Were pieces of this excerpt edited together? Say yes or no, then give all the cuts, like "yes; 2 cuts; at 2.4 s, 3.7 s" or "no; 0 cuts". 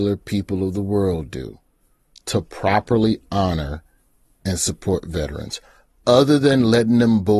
no; 0 cuts